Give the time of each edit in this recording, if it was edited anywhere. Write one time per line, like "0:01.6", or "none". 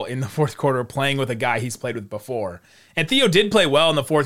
none